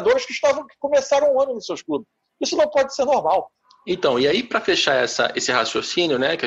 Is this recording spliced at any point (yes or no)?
no